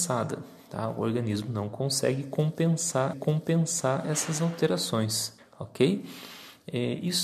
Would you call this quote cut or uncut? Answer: cut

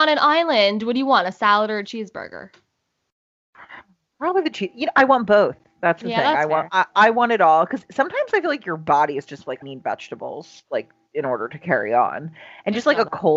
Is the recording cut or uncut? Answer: cut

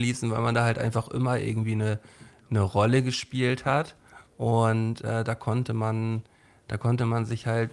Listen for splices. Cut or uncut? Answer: uncut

